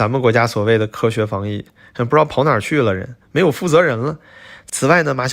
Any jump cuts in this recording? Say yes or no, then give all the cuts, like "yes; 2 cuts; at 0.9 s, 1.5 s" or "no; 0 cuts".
no; 0 cuts